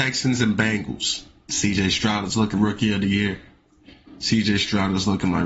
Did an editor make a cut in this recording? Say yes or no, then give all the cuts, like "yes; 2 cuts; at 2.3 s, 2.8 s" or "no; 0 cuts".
yes; 1 cut; at 2.5 s